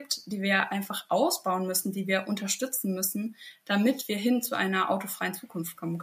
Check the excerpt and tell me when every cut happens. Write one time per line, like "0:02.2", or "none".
none